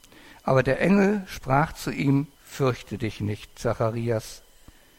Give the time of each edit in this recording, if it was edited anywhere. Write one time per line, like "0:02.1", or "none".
0:02.3

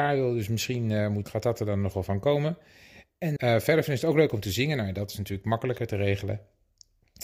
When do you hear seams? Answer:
0:01.2
0:03.4

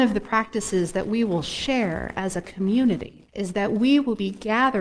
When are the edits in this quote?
0:03.3

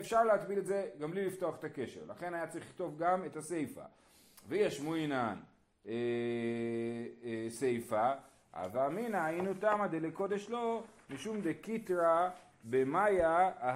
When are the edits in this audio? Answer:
none

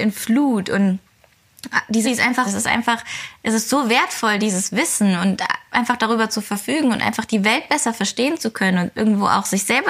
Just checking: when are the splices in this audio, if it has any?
0:02.0
0:02.5

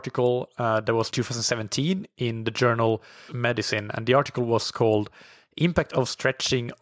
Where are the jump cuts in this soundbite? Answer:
0:01.1
0:03.3

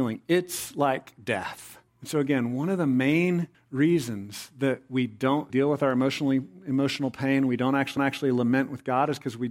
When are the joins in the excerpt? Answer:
0:01.9
0:03.5
0:05.5
0:08.0

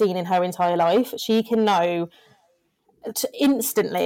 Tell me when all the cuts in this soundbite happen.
none

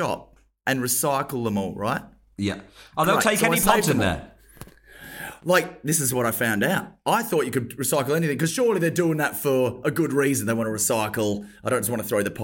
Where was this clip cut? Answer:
none

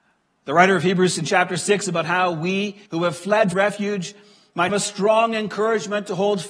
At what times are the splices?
0:01.2
0:02.9
0:03.5
0:04.7

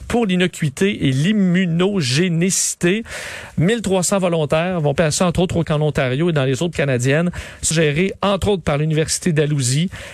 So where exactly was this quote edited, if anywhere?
0:05.0
0:05.6
0:06.7
0:07.7

